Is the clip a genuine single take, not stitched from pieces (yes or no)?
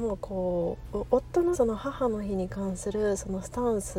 no